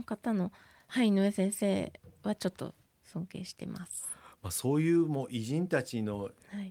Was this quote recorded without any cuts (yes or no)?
yes